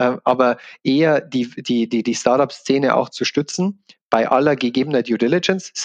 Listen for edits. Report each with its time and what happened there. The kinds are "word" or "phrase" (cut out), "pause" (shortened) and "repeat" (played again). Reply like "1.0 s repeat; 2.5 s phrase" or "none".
none